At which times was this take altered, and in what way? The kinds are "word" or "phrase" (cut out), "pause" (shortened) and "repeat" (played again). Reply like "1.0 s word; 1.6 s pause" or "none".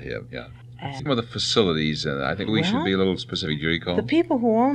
1.1 s phrase; 2.5 s word